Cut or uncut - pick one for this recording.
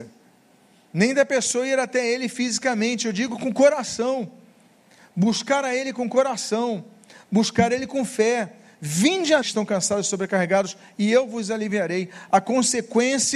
cut